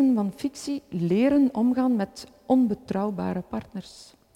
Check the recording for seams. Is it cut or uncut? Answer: uncut